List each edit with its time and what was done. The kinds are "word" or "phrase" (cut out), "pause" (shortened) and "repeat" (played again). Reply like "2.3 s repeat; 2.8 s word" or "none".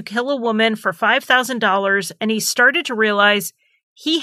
none